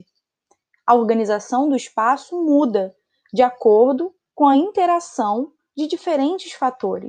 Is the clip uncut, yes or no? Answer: yes